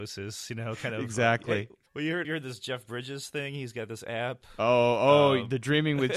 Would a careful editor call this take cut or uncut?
cut